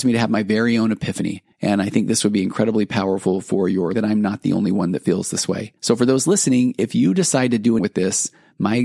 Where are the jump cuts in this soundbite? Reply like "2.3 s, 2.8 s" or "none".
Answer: 1.5 s, 3.9 s, 5.8 s, 7.8 s